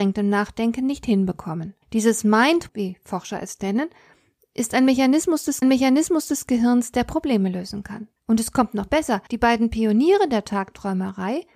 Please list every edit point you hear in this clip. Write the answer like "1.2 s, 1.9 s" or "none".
1.8 s, 2.7 s, 5.6 s, 8.2 s, 9.3 s